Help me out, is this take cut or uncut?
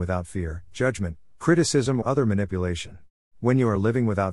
cut